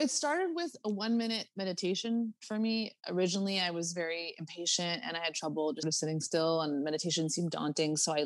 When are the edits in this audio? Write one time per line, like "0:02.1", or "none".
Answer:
0:05.8